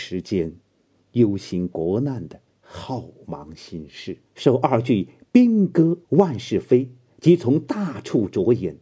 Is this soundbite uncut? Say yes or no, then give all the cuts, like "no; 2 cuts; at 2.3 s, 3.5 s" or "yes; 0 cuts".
no; 3 cuts; at 2.5 s, 4.3 s, 6.0 s